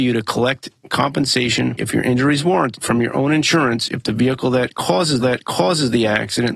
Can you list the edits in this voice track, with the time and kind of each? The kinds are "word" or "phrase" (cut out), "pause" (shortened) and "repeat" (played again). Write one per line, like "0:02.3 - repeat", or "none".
0:01.8 - word
0:02.7 - word
0:05.2 - repeat